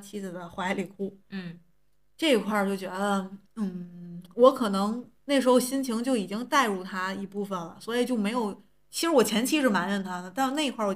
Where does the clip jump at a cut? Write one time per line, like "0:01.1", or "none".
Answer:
0:03.4
0:05.2